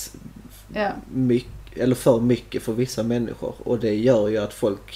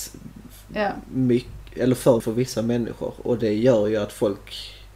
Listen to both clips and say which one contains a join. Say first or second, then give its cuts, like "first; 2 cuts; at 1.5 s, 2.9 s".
second; 1 cut; at 2.2 s